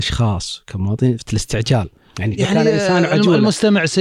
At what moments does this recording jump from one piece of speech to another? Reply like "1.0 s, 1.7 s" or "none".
1.2 s, 2.4 s